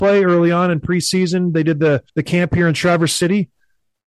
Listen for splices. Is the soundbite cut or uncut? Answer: cut